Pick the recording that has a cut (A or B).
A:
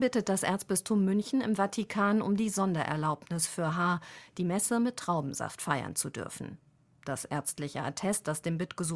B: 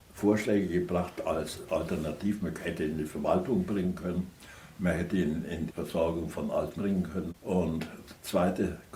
B